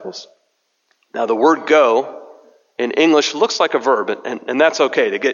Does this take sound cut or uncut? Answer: uncut